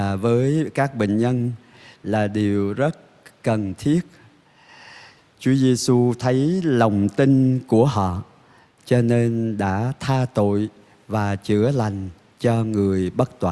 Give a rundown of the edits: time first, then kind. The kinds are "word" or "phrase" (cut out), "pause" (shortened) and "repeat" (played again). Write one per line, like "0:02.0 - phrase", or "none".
none